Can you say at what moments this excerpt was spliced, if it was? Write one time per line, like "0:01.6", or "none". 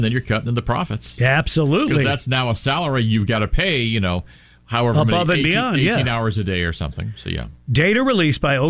none